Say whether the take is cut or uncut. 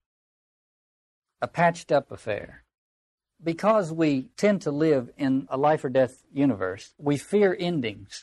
uncut